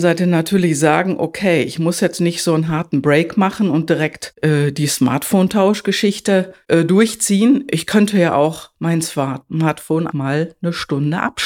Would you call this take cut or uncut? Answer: cut